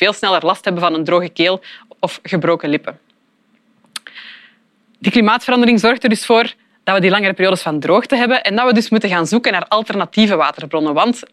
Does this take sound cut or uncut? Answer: uncut